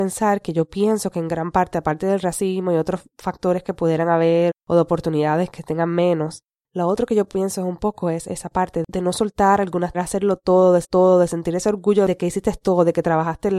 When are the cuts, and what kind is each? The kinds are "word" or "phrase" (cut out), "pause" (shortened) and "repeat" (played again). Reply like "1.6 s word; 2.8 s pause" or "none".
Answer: 4.5 s word; 9.9 s phrase; 10.8 s repeat